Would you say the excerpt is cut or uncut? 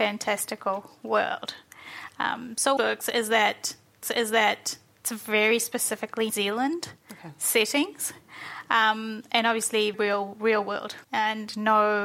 cut